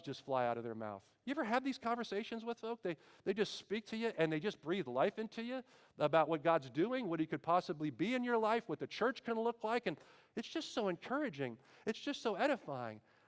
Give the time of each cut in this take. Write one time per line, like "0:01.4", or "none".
none